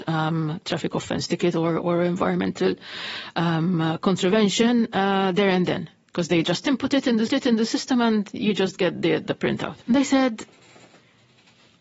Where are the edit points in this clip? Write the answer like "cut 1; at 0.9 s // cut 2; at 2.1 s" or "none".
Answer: cut 1; at 7.3 s // cut 2; at 9.8 s